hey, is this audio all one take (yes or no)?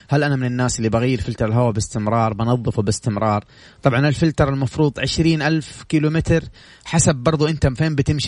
yes